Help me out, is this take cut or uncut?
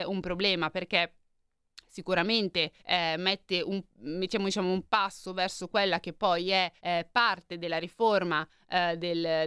cut